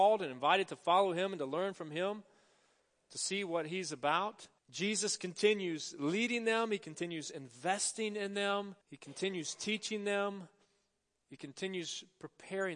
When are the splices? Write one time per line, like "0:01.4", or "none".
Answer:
0:04.6
0:08.8